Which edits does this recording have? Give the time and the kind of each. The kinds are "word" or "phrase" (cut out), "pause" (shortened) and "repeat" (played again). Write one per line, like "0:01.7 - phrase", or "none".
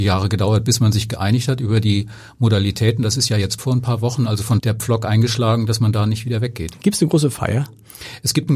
0:03.6 - word
0:04.6 - phrase